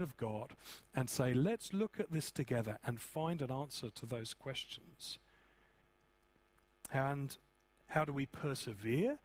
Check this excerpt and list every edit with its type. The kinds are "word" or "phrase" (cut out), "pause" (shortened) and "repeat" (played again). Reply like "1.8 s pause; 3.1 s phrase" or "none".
none